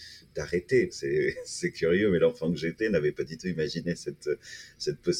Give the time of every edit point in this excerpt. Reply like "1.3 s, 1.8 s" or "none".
none